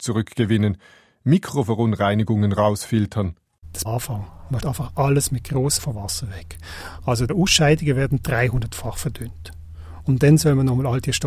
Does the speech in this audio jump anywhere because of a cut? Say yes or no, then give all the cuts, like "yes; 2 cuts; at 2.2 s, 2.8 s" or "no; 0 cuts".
yes; 4 cuts; at 3.8 s, 4.6 s, 5.8 s, 7.3 s